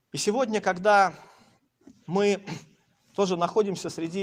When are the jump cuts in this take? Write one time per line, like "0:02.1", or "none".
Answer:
none